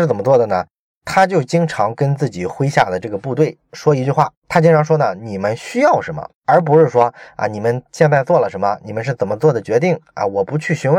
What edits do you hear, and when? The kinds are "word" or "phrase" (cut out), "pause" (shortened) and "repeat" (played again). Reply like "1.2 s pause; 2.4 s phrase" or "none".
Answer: 4.4 s pause; 6.4 s pause